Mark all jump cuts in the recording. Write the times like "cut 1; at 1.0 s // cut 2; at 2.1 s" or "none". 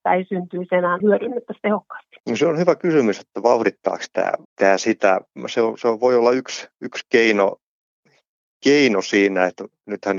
cut 1; at 1.0 s // cut 2; at 2.2 s // cut 3; at 4.4 s